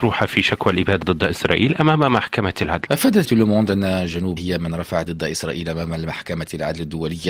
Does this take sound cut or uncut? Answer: cut